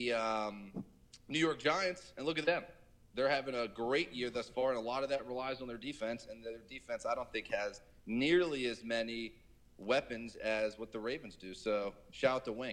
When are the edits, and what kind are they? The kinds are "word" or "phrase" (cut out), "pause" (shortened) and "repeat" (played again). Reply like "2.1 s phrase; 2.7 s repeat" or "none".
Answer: none